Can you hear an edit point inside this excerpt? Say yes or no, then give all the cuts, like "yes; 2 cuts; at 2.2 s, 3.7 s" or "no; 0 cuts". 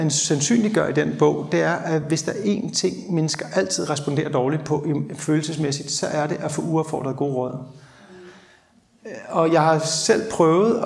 no; 0 cuts